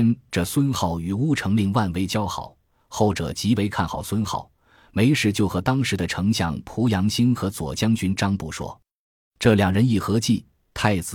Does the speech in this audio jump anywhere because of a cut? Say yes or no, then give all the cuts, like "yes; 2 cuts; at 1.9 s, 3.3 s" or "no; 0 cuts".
no; 0 cuts